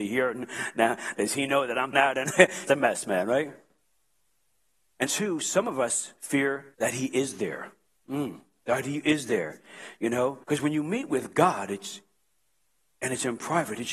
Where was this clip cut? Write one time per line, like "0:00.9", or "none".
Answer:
0:01.9
0:02.7
0:05.1
0:06.7
0:07.9
0:10.4